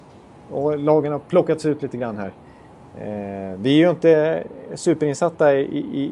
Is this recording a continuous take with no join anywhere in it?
yes; 0 cuts

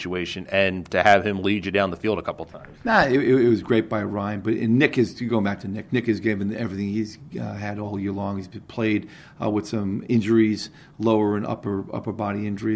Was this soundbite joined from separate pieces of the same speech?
no; 0 cuts

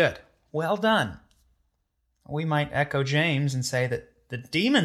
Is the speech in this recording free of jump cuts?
yes; 0 cuts

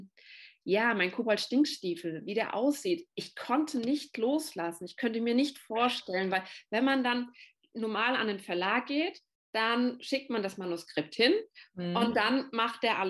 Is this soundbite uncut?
yes; 0 cuts

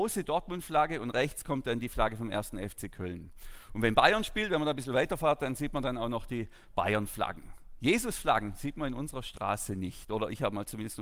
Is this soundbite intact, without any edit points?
yes; 0 cuts

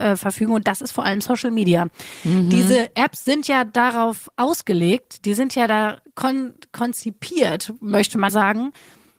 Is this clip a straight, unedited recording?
no; 2 cuts; at 6.0 s, 8.3 s

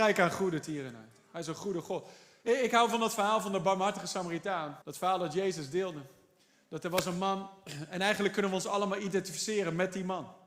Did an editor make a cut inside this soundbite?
yes; 1 cut; at 4.8 s

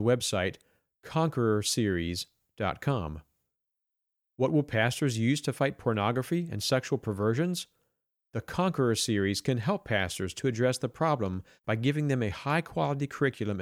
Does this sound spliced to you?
no; 0 cuts

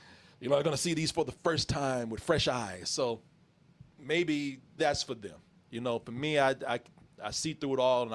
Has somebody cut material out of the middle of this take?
yes; 1 cut; at 4.8 s

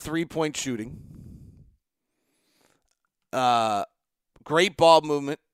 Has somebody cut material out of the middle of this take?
no; 0 cuts

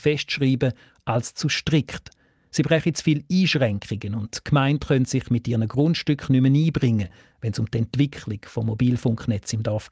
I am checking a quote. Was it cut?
no; 0 cuts

